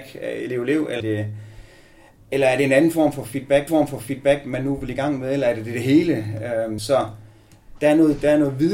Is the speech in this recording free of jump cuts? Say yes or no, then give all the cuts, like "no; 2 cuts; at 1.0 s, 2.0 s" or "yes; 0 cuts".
no; 3 cuts; at 1.0 s, 3.7 s, 6.8 s